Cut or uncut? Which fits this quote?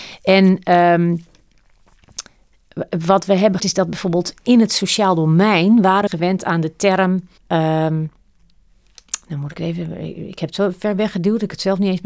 cut